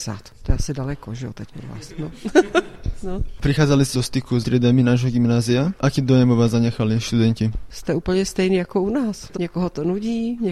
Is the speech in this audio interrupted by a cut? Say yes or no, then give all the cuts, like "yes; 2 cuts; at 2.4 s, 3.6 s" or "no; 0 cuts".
yes; 4 cuts; at 1.5 s, 3.9 s, 4.4 s, 9.4 s